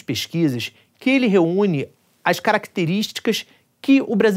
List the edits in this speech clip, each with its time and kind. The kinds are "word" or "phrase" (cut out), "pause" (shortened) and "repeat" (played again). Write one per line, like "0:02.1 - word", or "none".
none